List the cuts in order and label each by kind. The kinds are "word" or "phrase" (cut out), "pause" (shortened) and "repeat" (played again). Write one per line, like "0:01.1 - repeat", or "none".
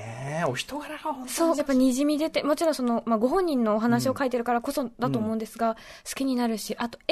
0:01.6 - word

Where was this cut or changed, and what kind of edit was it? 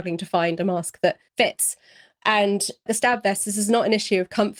0:01.3 - pause
0:02.9 - word

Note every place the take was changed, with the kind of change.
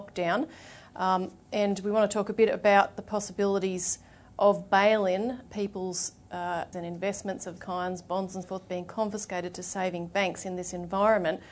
0:05.5 - word
0:06.7 - word
0:07.6 - word
0:08.4 - word

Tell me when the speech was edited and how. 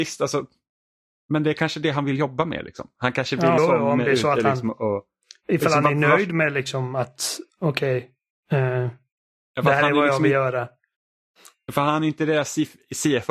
0:03.6 - word

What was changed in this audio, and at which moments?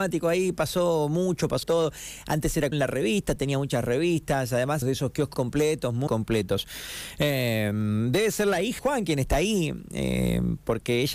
0:01.6 - word
0:02.7 - word
0:04.8 - word
0:05.3 - word
0:06.1 - word
0:08.8 - word

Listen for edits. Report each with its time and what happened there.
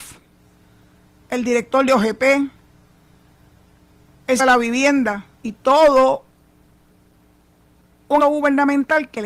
0:04.4 - word
0:05.3 - pause
0:08.2 - word

